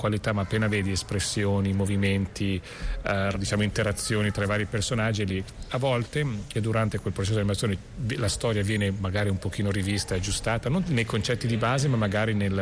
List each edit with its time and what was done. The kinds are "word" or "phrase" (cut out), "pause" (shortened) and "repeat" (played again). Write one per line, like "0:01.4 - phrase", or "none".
0:03.3 - word
0:06.5 - word
0:10.8 - word